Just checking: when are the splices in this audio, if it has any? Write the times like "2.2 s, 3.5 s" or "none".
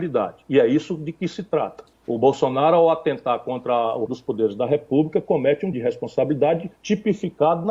1.9 s, 4.1 s, 5.7 s, 6.8 s